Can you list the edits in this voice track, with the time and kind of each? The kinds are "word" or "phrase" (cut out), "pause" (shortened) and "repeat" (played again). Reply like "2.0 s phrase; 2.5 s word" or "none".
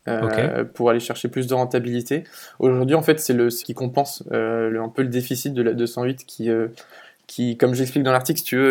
3.6 s word; 4.7 s word